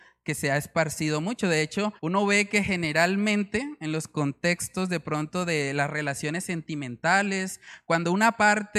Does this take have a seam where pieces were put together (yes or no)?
yes